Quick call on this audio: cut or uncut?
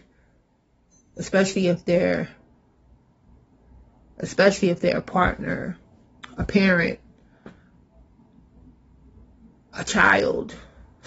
uncut